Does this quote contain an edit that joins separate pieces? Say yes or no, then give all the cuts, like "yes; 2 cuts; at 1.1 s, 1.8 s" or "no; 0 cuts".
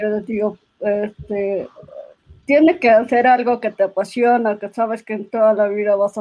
no; 0 cuts